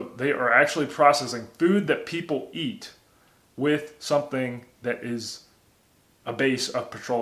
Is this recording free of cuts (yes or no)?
yes